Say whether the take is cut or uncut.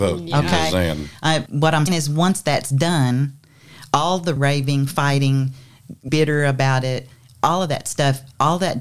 cut